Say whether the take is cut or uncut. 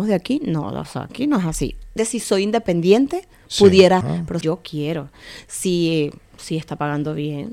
cut